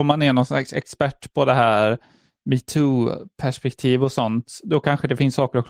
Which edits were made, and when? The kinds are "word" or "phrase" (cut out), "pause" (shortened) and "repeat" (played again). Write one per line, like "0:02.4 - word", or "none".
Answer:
none